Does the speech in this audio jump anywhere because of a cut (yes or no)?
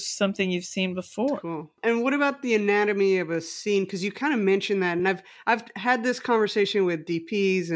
no